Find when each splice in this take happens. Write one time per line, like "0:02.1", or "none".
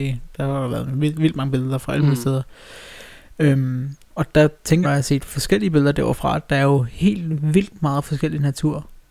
0:04.0
0:04.8

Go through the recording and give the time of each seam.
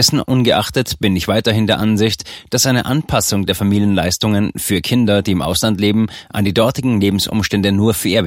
none

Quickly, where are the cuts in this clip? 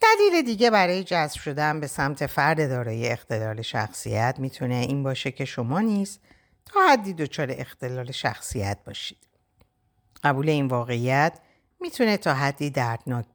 none

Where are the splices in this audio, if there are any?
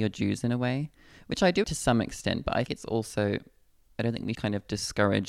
0:01.6
0:02.7
0:04.3

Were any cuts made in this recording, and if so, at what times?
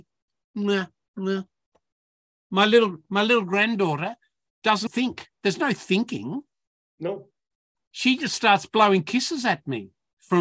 0:04.9

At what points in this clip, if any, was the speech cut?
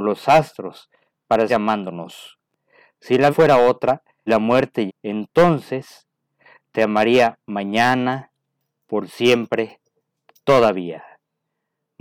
0:01.5
0:03.3
0:04.3
0:04.9
0:07.4

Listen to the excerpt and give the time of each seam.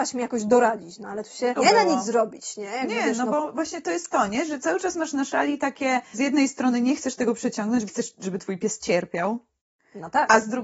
0:01.6
0:06.1
0:07.9

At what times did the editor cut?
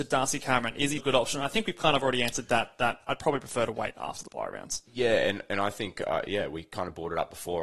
0:01.0

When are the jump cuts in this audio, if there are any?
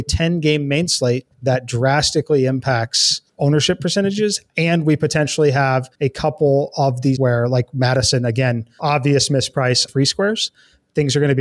0:01.3
0:03.3
0:04.5
0:05.9
0:07.2
0:08.8
0:09.9

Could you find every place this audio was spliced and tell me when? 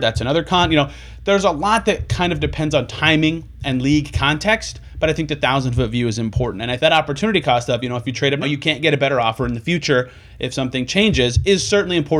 0:06.8
0:08.4

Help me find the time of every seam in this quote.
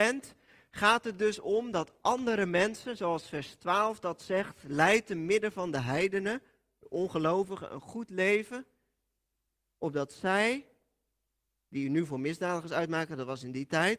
none

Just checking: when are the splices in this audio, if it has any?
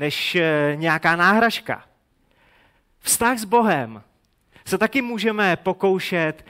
none

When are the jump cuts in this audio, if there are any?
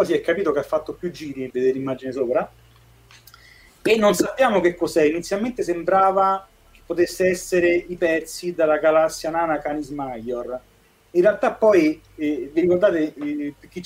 0:01.5
0:08.0
0:12.1

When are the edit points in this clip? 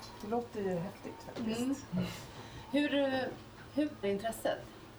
0:04.0

